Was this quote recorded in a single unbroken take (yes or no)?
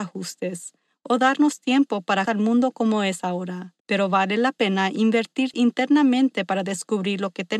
no